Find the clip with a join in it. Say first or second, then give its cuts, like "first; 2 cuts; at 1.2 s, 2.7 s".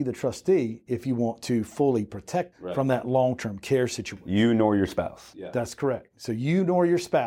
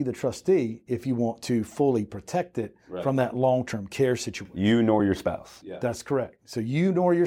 first; 1 cut; at 2.5 s